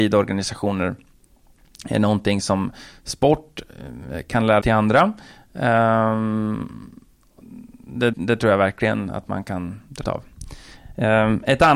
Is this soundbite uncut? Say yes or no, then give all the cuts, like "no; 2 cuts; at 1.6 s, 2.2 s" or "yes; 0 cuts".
no; 3 cuts; at 4.6 s, 8.1 s, 10.0 s